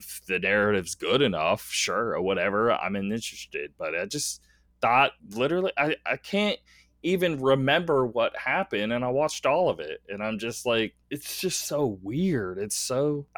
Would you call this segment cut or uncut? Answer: cut